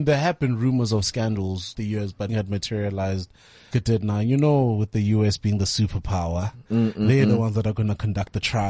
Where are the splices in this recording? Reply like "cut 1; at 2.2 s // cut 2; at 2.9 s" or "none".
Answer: cut 1; at 1.7 s // cut 2; at 2.3 s // cut 3; at 3.7 s

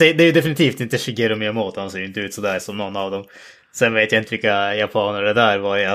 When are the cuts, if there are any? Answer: none

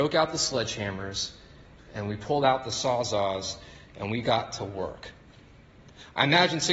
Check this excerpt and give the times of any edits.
none

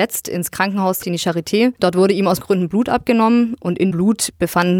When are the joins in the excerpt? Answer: cut 1; at 1.0 s // cut 2; at 1.8 s // cut 3; at 2.4 s // cut 4; at 3.9 s

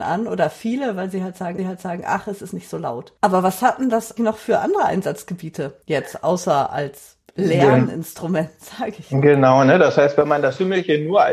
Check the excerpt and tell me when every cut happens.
cut 1; at 1.6 s // cut 2; at 3.2 s // cut 3; at 4.2 s // cut 4; at 5.8 s // cut 5; at 7.2 s

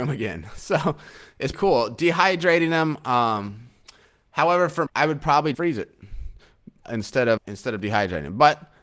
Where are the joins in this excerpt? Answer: cut 1; at 1.5 s // cut 2; at 4.9 s // cut 3; at 5.5 s // cut 4; at 7.4 s

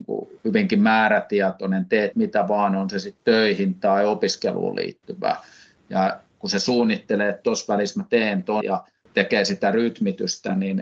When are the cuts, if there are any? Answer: cut 1; at 2.1 s // cut 2; at 8.6 s

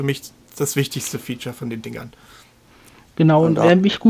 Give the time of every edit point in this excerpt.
none

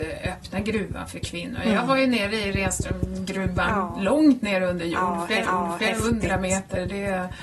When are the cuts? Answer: cut 1; at 5.4 s

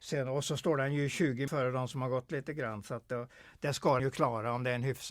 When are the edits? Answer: cut 1; at 1.5 s // cut 2; at 4.0 s

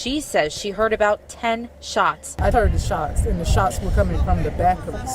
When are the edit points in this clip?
cut 1; at 2.5 s

